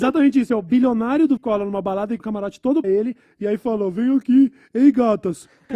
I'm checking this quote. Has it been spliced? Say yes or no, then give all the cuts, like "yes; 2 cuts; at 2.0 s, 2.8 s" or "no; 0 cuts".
yes; 3 cuts; at 1.4 s, 2.2 s, 2.8 s